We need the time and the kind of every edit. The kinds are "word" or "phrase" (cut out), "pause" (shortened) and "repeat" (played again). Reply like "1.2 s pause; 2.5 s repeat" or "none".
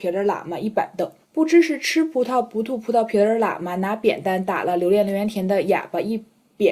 1.2 s pause

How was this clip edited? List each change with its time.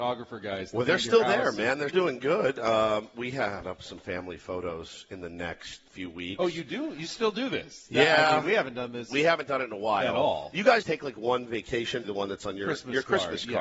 1.9 s word; 3.6 s phrase; 5.9 s pause; 10.8 s word; 12.0 s phrase

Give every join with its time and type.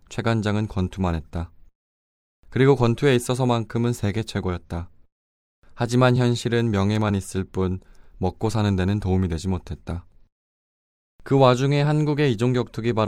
none

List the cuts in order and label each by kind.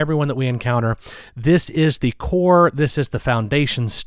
none

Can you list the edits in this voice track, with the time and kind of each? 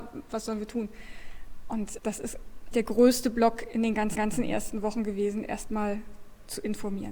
2.0 s word; 2.7 s word; 4.2 s repeat

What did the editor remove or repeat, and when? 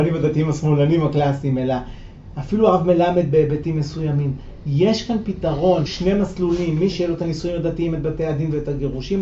5.9 s word; 6.9 s word

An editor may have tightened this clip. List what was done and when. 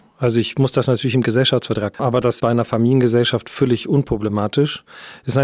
1.9 s word; 2.4 s word

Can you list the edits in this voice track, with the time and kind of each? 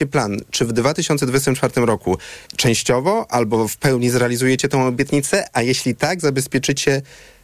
2.5 s pause; 6.2 s word

